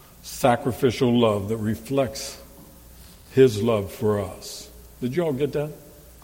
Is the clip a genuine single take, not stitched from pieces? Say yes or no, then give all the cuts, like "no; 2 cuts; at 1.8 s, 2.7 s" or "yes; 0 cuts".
yes; 0 cuts